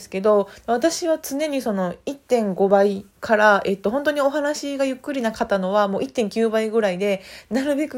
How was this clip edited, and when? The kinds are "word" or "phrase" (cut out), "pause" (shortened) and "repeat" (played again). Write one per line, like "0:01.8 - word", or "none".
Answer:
0:03.1 - pause